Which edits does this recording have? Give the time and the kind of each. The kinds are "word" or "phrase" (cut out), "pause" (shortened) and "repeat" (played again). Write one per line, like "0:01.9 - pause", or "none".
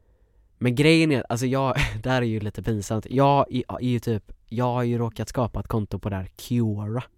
none